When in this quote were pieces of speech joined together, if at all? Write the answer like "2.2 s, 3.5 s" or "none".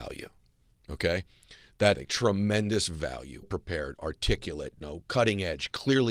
1.9 s, 3.4 s, 4.8 s